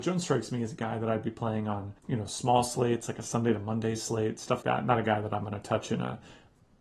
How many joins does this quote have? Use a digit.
2